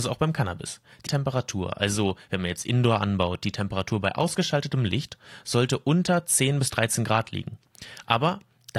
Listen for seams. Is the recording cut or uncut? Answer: cut